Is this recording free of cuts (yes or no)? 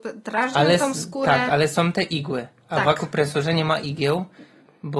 yes